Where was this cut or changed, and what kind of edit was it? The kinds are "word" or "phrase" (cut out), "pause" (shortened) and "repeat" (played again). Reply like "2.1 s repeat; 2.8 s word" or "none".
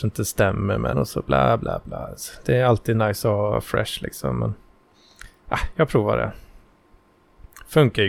0.9 s phrase

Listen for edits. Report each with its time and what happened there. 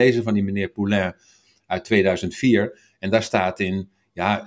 none

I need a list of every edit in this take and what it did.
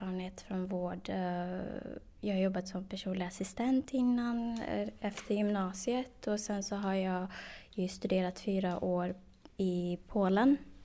none

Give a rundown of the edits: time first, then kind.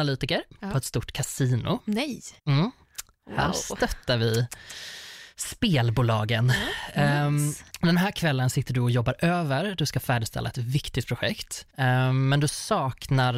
2.4 s pause; 7.7 s pause; 11.7 s pause

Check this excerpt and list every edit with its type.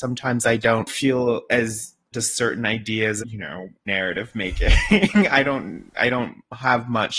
2.1 s word; 3.2 s word; 3.9 s word

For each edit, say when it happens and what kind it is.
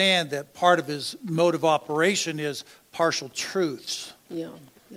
none

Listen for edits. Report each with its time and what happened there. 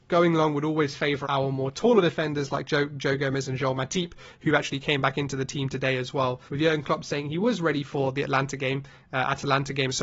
1.2 s word; 6.5 s pause

